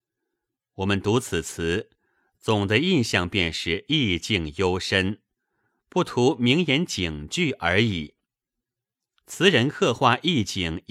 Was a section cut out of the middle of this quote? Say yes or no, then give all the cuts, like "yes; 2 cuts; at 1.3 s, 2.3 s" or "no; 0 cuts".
no; 0 cuts